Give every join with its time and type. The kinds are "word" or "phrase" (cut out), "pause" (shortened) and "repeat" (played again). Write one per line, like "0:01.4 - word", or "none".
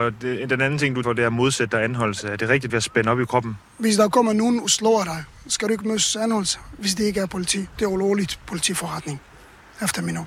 0:01.0 - word
0:02.7 - phrase